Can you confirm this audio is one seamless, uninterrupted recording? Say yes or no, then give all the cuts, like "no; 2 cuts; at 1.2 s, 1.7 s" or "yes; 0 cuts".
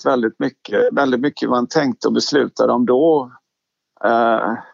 yes; 0 cuts